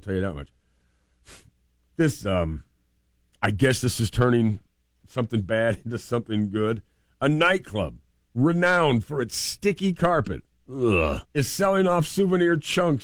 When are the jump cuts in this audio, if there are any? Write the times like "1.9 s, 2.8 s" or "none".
11.3 s